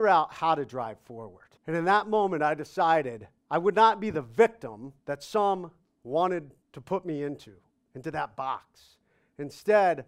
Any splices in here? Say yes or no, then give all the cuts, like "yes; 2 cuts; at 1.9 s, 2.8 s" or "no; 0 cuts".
yes; 3 cuts; at 1.6 s, 5.0 s, 6.6 s